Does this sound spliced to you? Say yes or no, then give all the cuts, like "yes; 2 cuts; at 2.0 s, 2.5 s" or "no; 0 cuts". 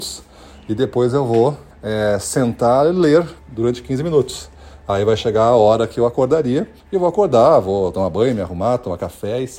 yes; 3 cuts; at 1.7 s, 3.4 s, 6.8 s